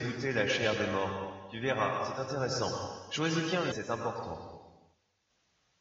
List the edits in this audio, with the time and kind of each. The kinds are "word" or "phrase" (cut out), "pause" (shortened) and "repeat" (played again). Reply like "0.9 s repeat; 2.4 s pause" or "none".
3.7 s word